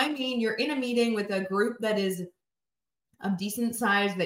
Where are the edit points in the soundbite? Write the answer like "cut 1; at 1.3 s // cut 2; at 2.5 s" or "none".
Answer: none